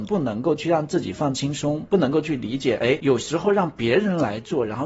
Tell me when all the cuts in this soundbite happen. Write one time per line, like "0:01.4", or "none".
none